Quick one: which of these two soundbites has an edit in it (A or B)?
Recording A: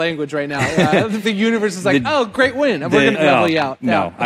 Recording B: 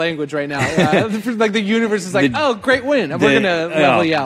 A